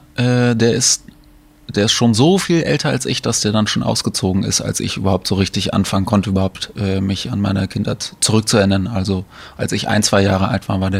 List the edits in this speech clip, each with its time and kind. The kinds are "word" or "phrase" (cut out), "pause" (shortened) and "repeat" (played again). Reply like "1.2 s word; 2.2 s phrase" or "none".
none